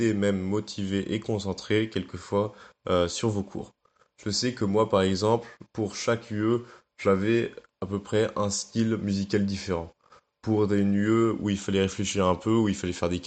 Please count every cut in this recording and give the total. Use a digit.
0